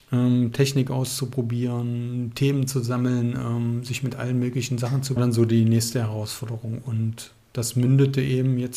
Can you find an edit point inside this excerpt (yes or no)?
yes